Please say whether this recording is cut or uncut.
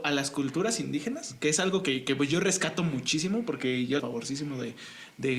cut